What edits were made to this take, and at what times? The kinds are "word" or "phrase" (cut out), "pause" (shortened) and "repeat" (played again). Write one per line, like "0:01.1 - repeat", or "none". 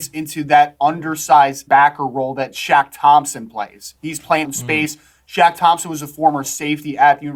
0:01.7 - word
0:04.4 - word

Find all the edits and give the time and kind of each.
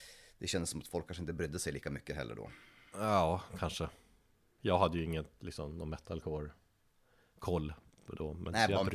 none

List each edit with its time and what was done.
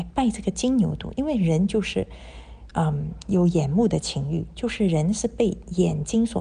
none

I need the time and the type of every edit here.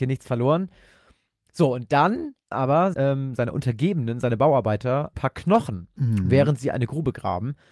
0:02.5 - word
0:02.9 - word
0:03.4 - word
0:05.1 - word

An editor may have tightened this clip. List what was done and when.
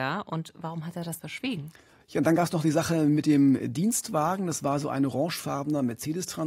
0:01.2 - word

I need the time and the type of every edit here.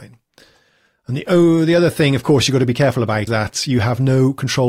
0:03.3 - word

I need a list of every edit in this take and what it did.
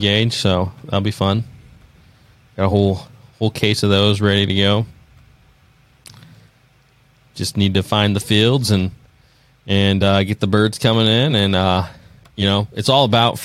none

